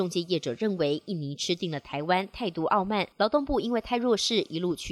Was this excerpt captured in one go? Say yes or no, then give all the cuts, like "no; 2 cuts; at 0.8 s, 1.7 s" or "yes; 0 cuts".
no; 1 cut; at 3.1 s